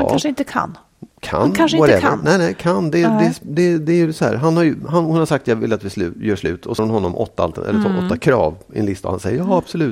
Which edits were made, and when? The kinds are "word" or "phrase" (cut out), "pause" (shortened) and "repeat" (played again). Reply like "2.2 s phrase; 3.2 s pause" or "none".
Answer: 6.8 s phrase